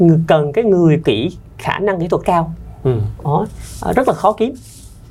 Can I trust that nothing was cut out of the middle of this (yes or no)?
no